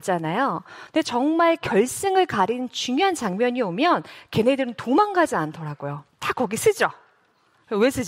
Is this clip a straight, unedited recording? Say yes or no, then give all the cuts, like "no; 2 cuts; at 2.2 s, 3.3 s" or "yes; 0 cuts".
no; 1 cut; at 6.1 s